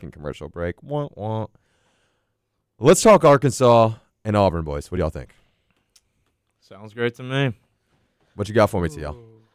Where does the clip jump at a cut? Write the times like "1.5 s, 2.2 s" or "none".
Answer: none